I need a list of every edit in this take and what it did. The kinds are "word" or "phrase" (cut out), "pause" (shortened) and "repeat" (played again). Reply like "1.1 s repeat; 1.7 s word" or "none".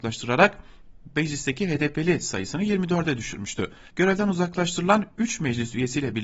3.9 s pause